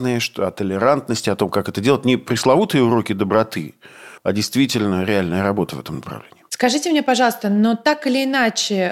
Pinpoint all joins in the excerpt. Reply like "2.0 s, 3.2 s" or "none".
4.2 s